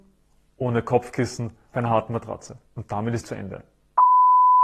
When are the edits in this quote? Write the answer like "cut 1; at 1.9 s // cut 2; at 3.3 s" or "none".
cut 1; at 1.7 s // cut 2; at 2.7 s // cut 3; at 3.2 s